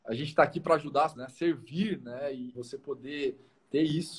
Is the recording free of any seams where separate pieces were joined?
no; 2 cuts; at 1.2 s, 2.5 s

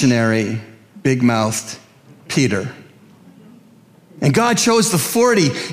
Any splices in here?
no; 0 cuts

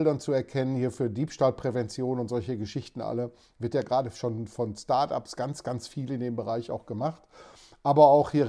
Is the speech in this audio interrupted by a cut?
no; 0 cuts

